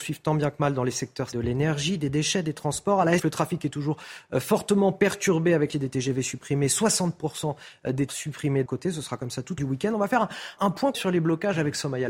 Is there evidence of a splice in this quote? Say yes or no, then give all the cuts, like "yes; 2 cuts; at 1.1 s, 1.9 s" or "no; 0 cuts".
yes; 8 cuts; at 1.3 s, 3.2 s, 5.7 s, 8.1 s, 8.7 s, 9.6 s, 10.6 s, 10.9 s